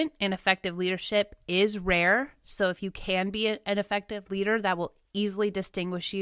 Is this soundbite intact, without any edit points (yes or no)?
yes